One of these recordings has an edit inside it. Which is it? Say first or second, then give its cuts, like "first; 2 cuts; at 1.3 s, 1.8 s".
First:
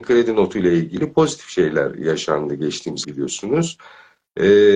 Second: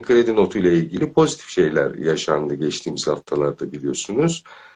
first; 1 cut; at 3.0 s